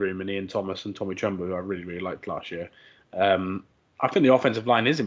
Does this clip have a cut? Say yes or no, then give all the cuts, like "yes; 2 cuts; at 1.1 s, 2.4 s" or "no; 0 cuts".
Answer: no; 0 cuts